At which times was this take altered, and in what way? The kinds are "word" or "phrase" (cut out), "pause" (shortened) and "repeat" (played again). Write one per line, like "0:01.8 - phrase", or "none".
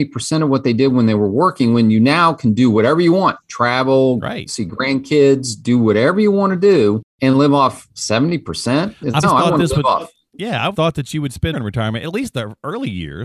0:07.1 - pause
0:09.2 - word
0:10.7 - word
0:11.5 - word

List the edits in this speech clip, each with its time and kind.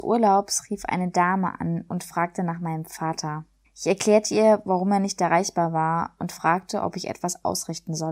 0:03.6 - pause

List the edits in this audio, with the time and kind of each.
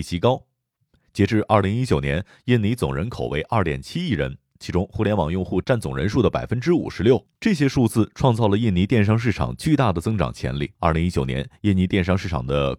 0:07.3 - pause
0:10.8 - pause

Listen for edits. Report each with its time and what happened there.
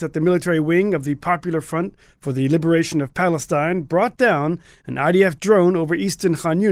none

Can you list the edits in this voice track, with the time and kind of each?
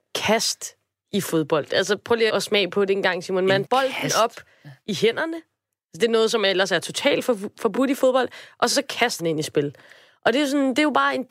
0:02.3 - word
0:03.6 - word
0:09.2 - word

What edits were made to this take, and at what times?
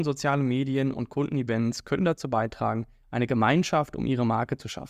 none

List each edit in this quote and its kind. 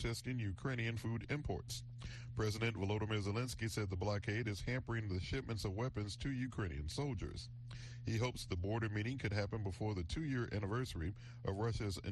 none

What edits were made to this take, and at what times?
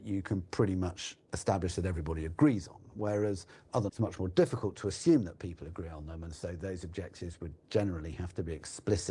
0:03.9 - phrase

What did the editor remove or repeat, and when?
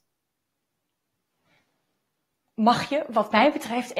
0:02.4 - word

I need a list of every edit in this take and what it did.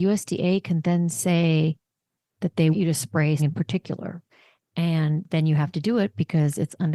0:02.7 - word
0:03.4 - word

